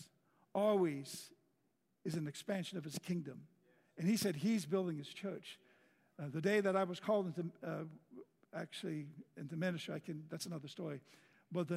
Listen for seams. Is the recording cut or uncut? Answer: uncut